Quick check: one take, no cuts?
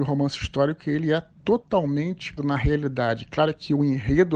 no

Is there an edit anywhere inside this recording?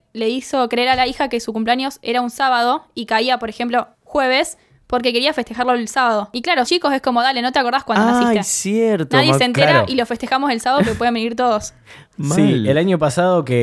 yes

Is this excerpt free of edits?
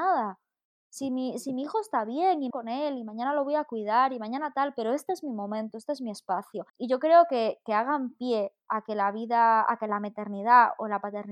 no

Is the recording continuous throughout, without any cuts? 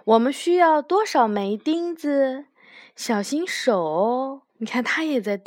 no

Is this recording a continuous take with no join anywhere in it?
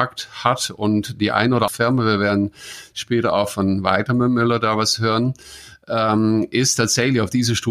no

